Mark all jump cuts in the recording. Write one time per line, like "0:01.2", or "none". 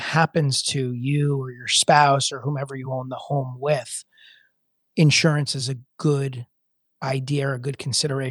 none